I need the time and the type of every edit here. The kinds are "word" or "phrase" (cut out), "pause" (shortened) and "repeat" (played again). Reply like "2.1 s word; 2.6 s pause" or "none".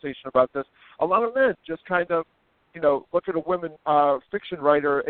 3.8 s pause